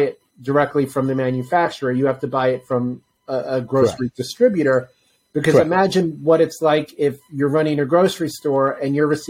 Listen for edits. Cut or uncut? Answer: uncut